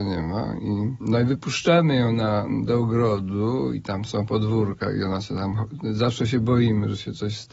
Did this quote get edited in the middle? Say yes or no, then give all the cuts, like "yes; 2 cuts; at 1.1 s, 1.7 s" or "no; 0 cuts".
no; 0 cuts